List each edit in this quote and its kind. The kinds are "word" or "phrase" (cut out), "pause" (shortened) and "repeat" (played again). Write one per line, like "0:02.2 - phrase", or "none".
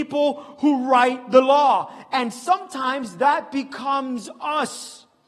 none